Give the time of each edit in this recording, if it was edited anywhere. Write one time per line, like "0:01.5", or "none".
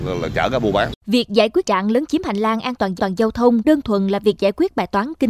0:01.0
0:01.6
0:03.0
0:03.6